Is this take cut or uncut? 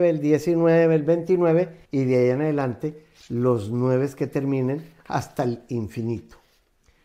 cut